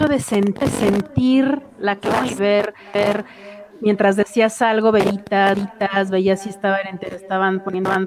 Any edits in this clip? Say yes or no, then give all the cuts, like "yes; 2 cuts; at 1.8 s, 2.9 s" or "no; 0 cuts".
no; 0 cuts